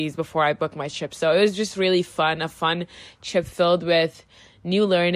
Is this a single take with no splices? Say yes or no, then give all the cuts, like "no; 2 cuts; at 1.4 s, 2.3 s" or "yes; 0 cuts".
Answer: yes; 0 cuts